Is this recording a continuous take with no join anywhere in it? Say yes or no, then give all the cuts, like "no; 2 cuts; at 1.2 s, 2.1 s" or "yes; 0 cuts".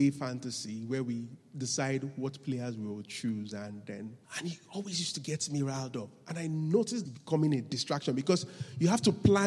no; 2 cuts; at 4.2 s, 7.1 s